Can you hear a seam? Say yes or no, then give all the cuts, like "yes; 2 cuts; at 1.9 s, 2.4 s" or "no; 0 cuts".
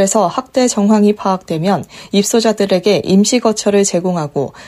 no; 0 cuts